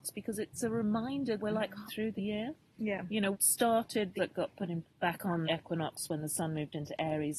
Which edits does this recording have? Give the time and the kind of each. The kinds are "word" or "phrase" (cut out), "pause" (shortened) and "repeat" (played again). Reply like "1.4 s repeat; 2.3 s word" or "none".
1.4 s word; 1.9 s word; 2.2 s word; 3.3 s word; 4.2 s word; 4.8 s word; 5.4 s word